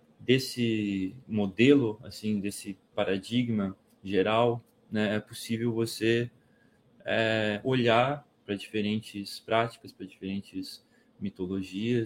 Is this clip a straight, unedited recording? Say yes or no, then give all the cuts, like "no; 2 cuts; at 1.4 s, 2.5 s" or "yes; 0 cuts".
yes; 0 cuts